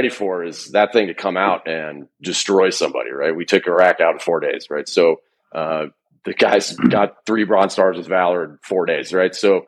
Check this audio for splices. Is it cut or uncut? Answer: uncut